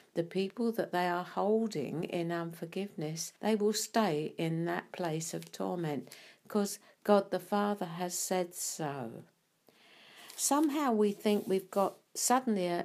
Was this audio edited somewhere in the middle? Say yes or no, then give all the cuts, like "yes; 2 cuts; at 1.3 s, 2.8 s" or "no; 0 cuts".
yes; 1 cut; at 3.4 s